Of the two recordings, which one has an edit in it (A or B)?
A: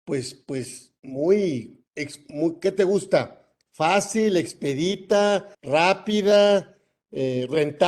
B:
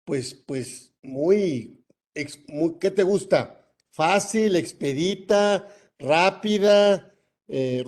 A